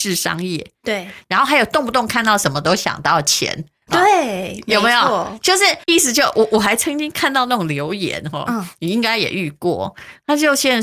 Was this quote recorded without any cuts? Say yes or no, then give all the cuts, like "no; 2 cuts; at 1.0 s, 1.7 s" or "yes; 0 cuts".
no; 1 cut; at 5.8 s